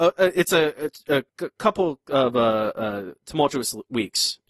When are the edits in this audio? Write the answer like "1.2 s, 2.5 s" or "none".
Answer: 1.3 s